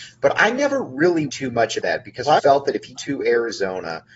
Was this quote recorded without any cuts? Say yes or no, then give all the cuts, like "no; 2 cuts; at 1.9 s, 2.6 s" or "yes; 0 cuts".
no; 4 cuts; at 1.3 s, 1.8 s, 2.4 s, 3.0 s